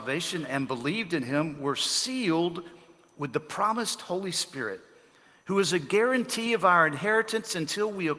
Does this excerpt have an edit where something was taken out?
no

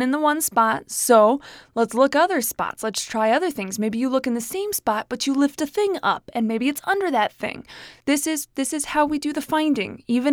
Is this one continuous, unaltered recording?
no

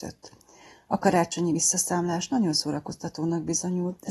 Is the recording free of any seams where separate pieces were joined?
yes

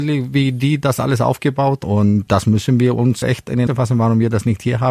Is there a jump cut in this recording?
yes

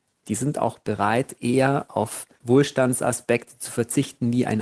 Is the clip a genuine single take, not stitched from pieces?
no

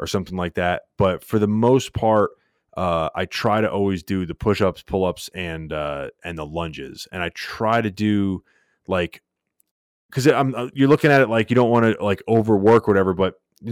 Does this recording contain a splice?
no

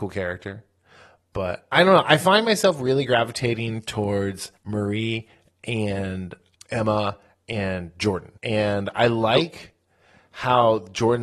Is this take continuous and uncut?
no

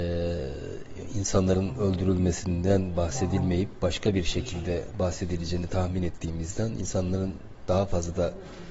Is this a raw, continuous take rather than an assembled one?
yes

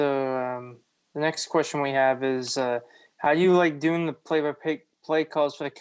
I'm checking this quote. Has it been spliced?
no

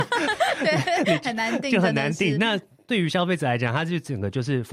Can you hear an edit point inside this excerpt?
no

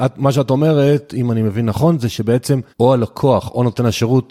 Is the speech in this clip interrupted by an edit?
yes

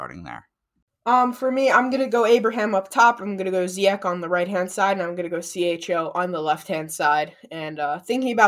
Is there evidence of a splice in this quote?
no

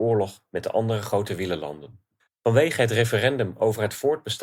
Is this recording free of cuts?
yes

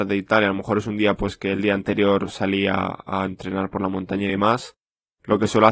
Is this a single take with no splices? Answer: yes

